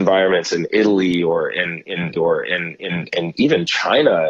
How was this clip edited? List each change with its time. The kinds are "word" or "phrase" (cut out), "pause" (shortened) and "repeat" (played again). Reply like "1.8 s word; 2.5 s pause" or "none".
2.2 s repeat

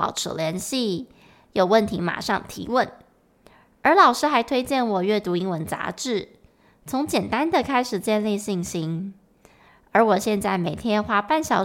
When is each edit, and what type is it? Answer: none

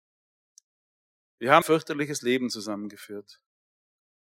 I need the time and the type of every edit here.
1.6 s word

